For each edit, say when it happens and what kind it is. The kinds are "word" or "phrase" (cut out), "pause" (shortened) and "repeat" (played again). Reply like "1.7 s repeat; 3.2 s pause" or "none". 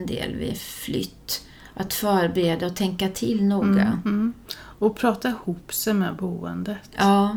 none